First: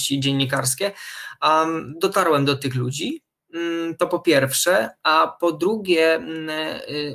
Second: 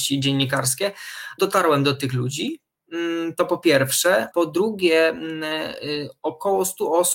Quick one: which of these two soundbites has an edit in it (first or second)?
second